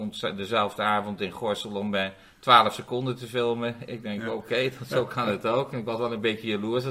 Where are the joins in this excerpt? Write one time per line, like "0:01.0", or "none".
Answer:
none